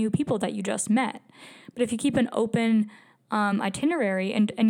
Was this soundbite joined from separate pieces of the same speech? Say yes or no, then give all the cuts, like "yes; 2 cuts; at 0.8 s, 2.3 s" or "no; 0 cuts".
no; 0 cuts